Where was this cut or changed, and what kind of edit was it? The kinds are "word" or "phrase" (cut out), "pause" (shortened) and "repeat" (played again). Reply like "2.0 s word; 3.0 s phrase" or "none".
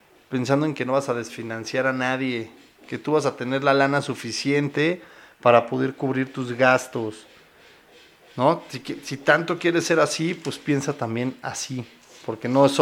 none